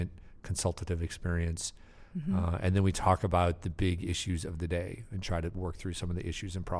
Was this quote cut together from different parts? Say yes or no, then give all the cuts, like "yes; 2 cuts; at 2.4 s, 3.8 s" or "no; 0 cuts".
no; 0 cuts